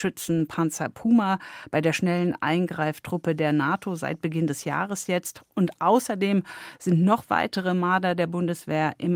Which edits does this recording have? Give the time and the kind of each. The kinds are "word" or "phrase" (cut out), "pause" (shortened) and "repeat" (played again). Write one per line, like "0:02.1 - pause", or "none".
none